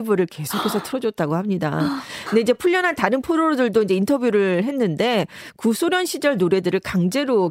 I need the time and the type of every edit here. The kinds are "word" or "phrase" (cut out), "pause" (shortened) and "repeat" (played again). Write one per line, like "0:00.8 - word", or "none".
none

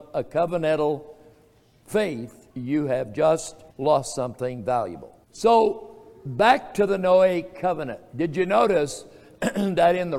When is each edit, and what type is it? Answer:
0:02.5 - pause
0:03.7 - pause
0:05.2 - pause

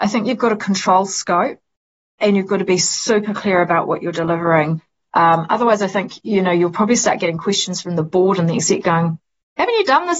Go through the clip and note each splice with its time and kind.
none

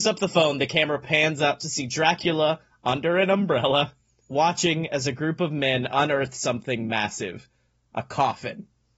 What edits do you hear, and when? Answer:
none

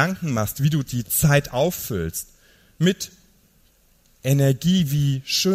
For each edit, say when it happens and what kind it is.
none

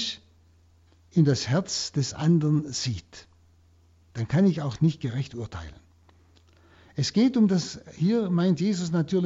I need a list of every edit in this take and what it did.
none

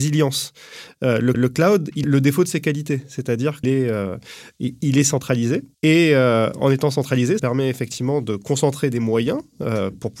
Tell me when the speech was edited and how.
0:01.3 - repeat
0:02.0 - word
0:03.6 - word
0:05.7 - pause
0:07.4 - word

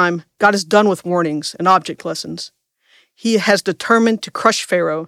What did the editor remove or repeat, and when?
none

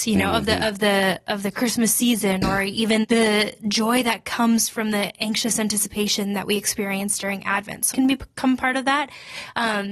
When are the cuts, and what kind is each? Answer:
0:03.0 - word
0:07.9 - phrase

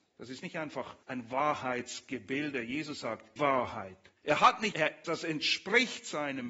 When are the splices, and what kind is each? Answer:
0:01.0 - pause
0:03.4 - phrase
0:04.2 - pause
0:04.7 - word
0:05.0 - phrase

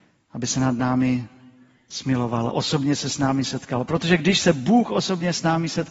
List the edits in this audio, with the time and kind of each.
0:02.5 - word

